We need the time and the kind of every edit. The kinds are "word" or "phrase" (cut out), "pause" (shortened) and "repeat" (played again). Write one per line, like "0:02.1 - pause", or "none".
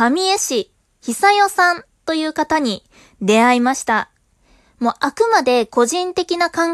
none